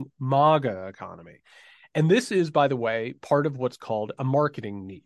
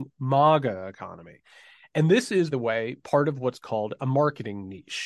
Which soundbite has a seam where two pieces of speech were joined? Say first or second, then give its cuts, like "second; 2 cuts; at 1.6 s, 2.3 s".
second; 1 cut; at 2.5 s